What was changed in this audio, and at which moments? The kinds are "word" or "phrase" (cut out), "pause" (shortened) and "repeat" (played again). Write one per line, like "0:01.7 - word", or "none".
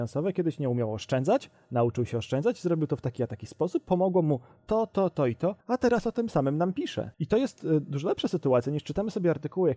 0:05.6 - pause
0:07.1 - pause